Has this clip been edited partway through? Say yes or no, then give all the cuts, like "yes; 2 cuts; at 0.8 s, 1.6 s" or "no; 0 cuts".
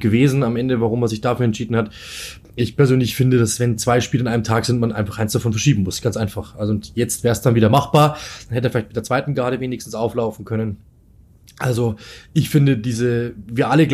no; 0 cuts